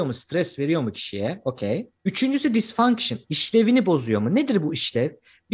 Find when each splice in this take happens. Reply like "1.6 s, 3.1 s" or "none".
2.0 s